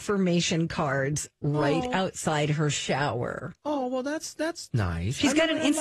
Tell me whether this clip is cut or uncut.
cut